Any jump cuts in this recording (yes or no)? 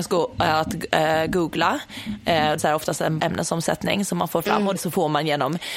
yes